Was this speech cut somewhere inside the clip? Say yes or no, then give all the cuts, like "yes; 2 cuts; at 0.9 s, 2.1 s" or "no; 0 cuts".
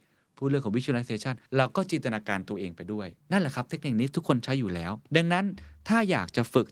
yes; 2 cuts; at 1.5 s, 3.2 s